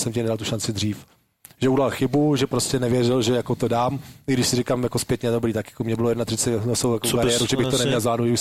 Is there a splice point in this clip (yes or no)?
no